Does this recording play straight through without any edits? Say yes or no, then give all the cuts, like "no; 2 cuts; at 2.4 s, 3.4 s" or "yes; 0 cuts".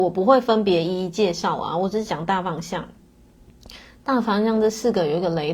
yes; 0 cuts